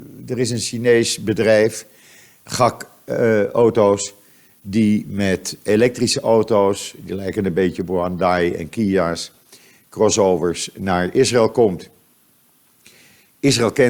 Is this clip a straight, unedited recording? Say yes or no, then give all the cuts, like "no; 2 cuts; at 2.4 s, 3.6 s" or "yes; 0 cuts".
yes; 0 cuts